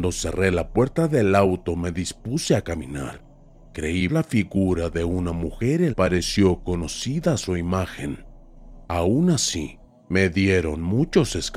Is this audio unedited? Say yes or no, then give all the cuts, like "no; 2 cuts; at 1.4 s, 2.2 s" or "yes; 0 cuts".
no; 2 cuts; at 4.1 s, 5.9 s